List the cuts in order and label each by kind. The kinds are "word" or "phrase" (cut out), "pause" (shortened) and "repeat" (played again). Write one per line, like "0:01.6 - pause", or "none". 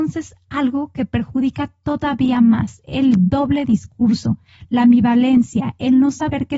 none